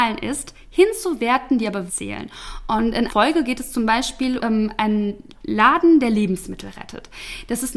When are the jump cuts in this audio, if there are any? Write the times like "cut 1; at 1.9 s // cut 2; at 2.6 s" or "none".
cut 1; at 1.9 s // cut 2; at 3.1 s // cut 3; at 4.4 s